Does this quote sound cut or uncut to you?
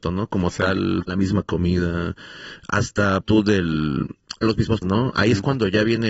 cut